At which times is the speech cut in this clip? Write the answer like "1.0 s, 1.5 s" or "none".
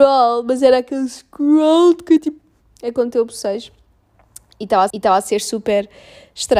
2.2 s, 4.9 s